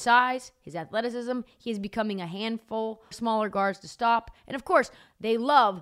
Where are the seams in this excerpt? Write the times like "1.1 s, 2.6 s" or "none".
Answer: 3.1 s